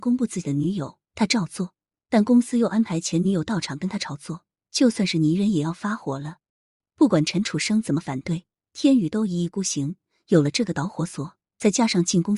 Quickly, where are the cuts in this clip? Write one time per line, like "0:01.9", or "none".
0:01.1